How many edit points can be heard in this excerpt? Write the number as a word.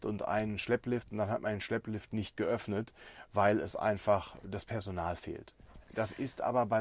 zero